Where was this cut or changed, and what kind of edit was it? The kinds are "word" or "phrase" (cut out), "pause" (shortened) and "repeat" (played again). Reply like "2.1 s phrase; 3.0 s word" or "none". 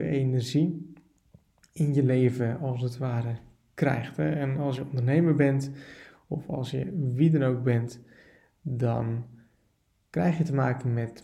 none